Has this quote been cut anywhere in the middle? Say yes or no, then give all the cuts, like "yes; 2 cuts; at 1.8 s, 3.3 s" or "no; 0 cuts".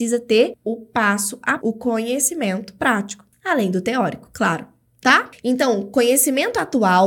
yes; 1 cut; at 1.6 s